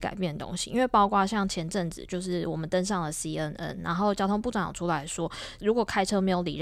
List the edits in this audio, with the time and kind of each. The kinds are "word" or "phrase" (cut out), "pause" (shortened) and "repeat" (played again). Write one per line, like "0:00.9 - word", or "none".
none